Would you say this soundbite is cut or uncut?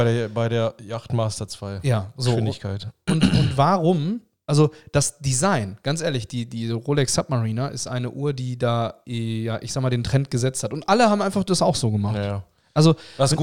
uncut